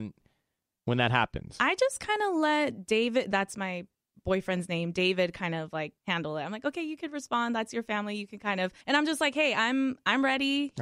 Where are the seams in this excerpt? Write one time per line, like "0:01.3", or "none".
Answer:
0:06.0
0:08.8